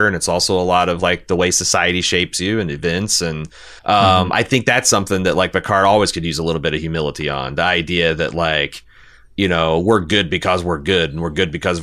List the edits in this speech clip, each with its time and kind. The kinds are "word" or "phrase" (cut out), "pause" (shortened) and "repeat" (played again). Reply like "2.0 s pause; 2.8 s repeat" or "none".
3.8 s pause